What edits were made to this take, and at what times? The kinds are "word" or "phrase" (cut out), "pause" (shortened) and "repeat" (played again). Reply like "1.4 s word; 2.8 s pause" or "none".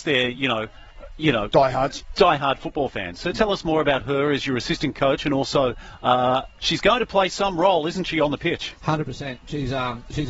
6.6 s word

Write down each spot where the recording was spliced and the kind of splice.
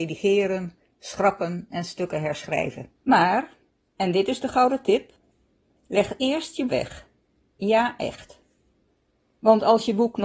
2.9 s pause; 6.7 s phrase

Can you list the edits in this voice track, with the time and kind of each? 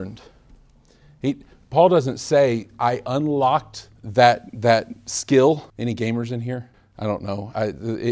4.0 s pause; 5.7 s pause; 6.7 s pause

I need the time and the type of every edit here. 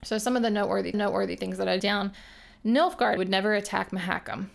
0.9 s repeat; 1.8 s word; 3.2 s word

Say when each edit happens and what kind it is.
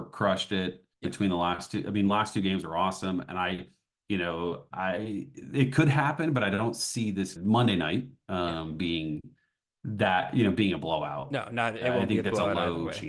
0.9 s pause; 7.4 s phrase

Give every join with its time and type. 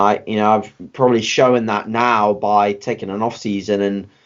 none

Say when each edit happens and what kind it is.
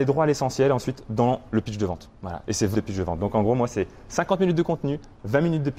2.2 s pause; 2.7 s word

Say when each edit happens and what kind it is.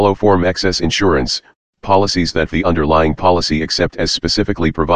2.5 s phrase

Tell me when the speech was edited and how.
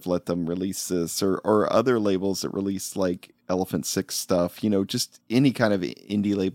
none

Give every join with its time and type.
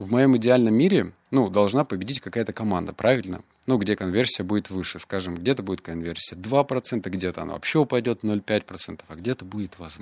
none

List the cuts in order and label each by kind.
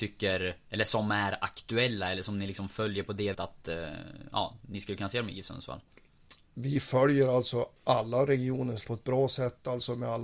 3.3 s word; 6.4 s pause; 7.8 s pause; 8.8 s word

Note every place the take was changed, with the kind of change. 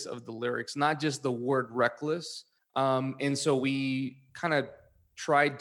2.6 s pause

